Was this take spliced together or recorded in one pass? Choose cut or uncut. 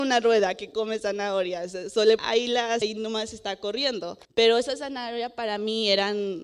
cut